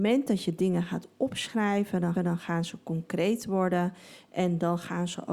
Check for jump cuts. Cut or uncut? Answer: cut